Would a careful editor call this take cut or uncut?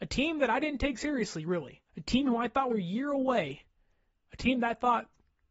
cut